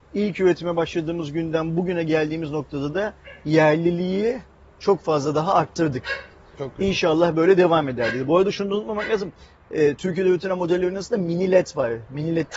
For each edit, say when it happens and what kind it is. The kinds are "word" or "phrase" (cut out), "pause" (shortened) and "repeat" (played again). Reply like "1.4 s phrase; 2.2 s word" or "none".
none